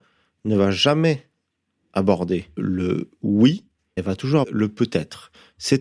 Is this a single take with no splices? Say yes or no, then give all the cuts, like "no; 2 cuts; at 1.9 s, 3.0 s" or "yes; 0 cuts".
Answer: no; 3 cuts; at 2.6 s, 4.0 s, 4.4 s